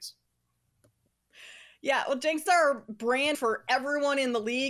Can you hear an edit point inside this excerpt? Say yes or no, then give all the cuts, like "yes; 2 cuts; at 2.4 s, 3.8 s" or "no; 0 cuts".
yes; 2 cuts; at 2.5 s, 3.3 s